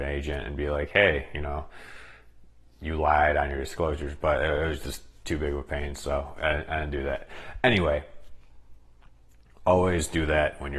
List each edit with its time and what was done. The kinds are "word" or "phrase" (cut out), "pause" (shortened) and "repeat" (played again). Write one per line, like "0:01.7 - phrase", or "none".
none